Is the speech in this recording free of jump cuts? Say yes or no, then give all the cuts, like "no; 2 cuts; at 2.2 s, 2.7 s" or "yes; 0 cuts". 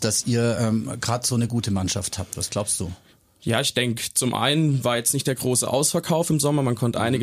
yes; 0 cuts